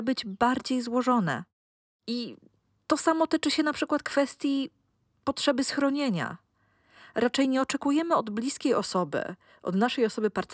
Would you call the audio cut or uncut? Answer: uncut